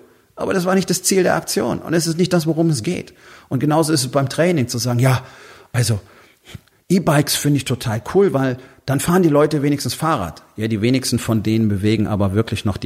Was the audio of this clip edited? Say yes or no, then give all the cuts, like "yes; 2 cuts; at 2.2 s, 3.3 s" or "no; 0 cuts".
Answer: no; 0 cuts